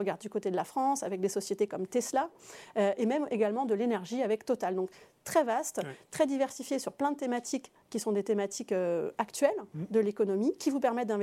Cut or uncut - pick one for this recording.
uncut